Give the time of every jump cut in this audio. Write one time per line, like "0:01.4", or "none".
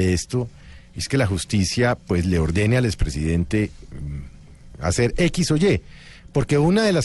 none

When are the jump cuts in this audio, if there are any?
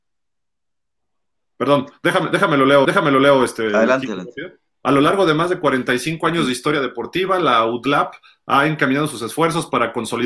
0:02.8

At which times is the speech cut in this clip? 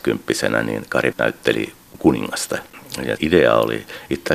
0:01.1
0:03.2

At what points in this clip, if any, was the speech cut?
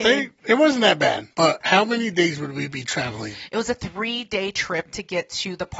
0:01.3

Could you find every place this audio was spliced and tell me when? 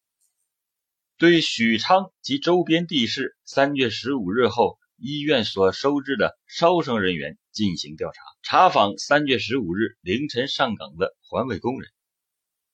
0:02.1
0:03.4
0:08.4

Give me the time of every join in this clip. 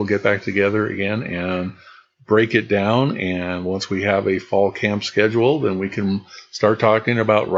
none

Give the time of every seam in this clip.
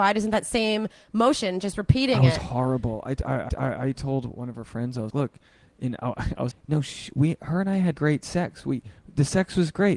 0:03.5
0:05.1
0:06.5
0:07.9

